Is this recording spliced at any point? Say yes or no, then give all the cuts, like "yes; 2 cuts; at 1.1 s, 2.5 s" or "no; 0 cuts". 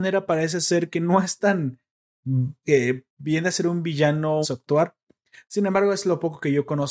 yes; 2 cuts; at 2.6 s, 4.4 s